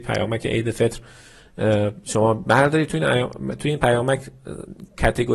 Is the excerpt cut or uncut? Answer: uncut